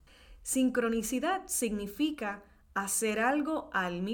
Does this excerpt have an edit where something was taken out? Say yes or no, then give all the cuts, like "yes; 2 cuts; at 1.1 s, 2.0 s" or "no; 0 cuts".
no; 0 cuts